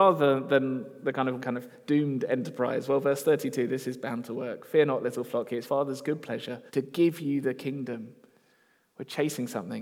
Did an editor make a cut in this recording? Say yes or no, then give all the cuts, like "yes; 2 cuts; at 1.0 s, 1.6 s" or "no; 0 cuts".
yes; 3 cuts; at 1.4 s, 5.6 s, 6.7 s